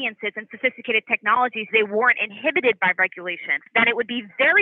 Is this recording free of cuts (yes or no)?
no